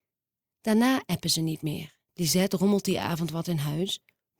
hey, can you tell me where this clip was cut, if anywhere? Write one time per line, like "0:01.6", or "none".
0:02.1